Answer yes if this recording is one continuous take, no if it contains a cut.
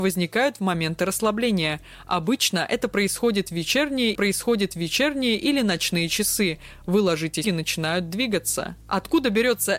no